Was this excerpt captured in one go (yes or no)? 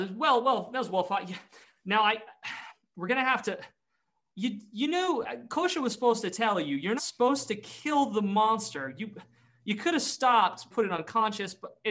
no